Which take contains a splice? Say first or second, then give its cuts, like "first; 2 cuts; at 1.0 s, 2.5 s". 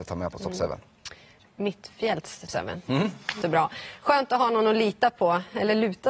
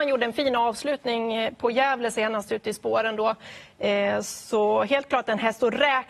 first; 2 cuts; at 2.5 s, 3.4 s